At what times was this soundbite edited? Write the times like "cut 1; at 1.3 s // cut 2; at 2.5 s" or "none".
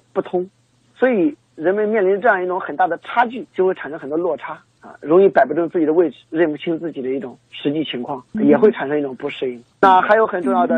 cut 1; at 3.5 s // cut 2; at 4.7 s // cut 3; at 6.2 s // cut 4; at 8.3 s // cut 5; at 9.7 s